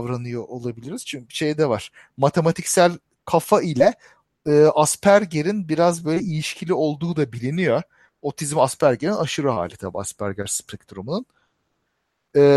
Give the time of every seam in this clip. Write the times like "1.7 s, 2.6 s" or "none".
none

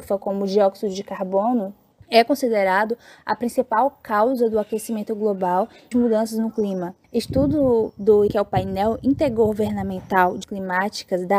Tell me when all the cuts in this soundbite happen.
5.9 s, 8.3 s, 10.4 s

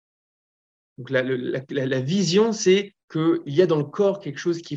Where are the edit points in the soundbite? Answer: 3.0 s

